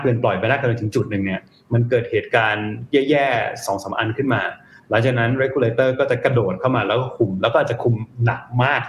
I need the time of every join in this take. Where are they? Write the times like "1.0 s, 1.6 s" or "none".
none